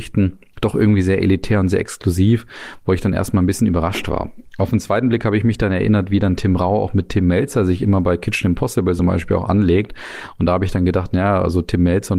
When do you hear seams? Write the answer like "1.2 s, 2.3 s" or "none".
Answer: none